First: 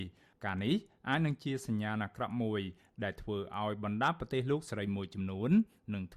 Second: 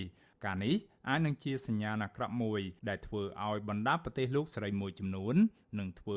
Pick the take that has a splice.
second; 1 cut; at 2.8 s

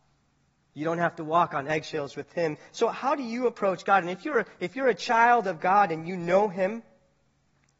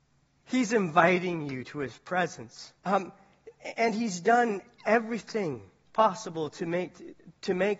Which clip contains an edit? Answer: second; 1 cut; at 2.8 s

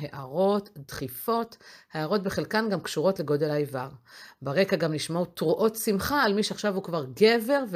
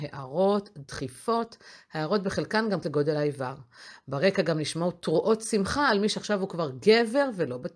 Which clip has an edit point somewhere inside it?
second; 1 cut; at 2.8 s

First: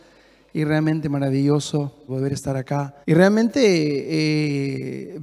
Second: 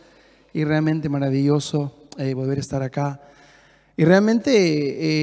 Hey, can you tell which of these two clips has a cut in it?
first; 2 cuts; at 2.1 s, 3.0 s

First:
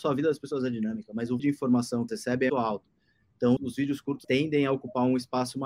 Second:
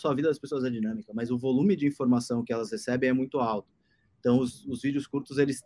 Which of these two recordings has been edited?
first; 5 cuts; at 1.4 s, 2.1 s, 2.5 s, 3.6 s, 4.2 s

